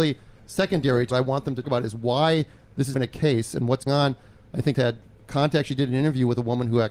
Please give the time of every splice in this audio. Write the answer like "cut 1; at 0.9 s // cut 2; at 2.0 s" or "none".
cut 1; at 1.1 s // cut 2; at 1.6 s // cut 3; at 2.9 s // cut 4; at 3.9 s // cut 5; at 4.7 s

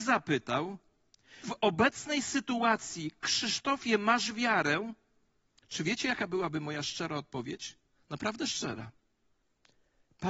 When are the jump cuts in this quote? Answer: cut 1; at 1.4 s

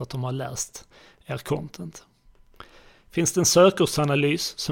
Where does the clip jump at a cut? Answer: none

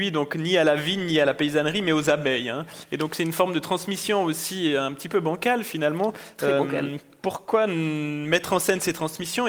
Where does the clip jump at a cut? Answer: none

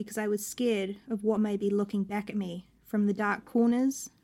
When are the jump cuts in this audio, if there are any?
none

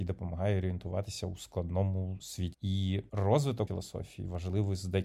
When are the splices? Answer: cut 1; at 2.5 s // cut 2; at 3.7 s

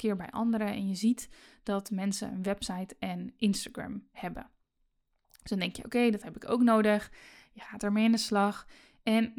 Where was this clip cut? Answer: none

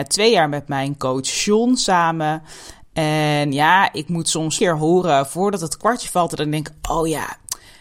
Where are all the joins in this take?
cut 1; at 4.6 s

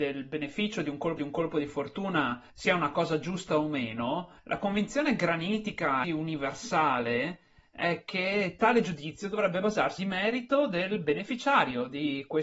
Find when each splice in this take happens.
cut 1; at 1.2 s // cut 2; at 2.5 s // cut 3; at 4.4 s // cut 4; at 6.0 s // cut 5; at 10.0 s

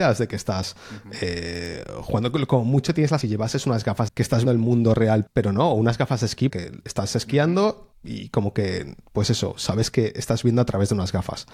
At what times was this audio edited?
cut 1; at 3.2 s // cut 2; at 4.1 s // cut 3; at 4.4 s // cut 4; at 5.3 s // cut 5; at 6.5 s // cut 6; at 7.9 s // cut 7; at 9.0 s

